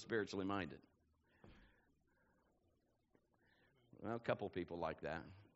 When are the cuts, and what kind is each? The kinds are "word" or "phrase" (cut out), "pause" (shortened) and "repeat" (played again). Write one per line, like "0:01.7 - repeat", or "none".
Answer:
none